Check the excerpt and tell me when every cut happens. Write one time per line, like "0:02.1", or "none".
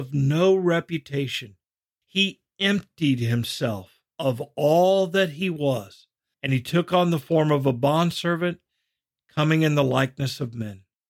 none